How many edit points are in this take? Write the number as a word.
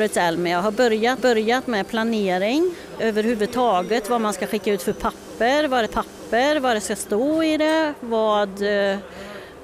three